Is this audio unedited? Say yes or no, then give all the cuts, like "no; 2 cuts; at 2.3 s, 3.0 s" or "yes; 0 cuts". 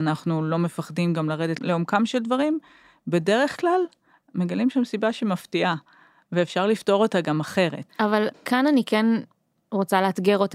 no; 2 cuts; at 1.6 s, 8.3 s